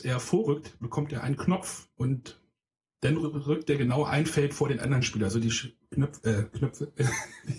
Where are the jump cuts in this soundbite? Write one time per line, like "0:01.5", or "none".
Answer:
0:01.9